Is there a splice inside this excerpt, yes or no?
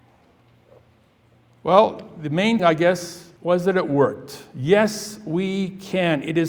yes